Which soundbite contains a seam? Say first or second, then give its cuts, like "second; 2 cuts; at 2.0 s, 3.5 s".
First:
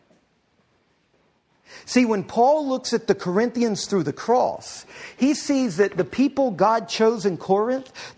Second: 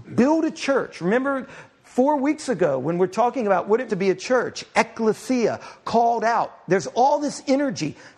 second; 1 cut; at 3.9 s